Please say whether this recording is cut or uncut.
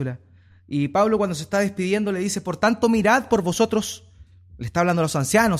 uncut